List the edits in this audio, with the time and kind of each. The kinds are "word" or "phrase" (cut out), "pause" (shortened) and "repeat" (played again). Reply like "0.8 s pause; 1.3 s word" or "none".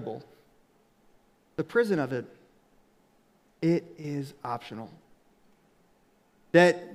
none